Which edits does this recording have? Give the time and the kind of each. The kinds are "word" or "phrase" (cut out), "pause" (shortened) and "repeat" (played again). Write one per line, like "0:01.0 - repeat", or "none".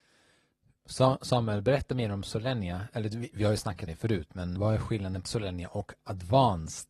0:03.9 - word
0:04.6 - word
0:05.2 - word